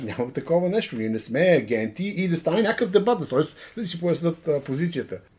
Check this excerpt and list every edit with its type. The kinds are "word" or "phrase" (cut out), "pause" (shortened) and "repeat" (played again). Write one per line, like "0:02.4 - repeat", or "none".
none